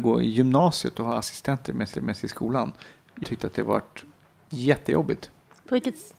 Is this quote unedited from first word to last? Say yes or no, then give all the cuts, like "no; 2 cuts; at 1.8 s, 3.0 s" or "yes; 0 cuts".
no; 2 cuts; at 1.9 s, 3.2 s